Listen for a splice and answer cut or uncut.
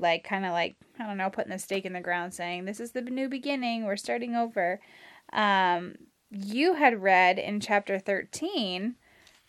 uncut